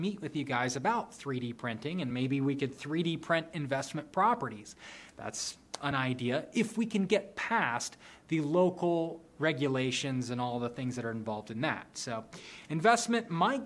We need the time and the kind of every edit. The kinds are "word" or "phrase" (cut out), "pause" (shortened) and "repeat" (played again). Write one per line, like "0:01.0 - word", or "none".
none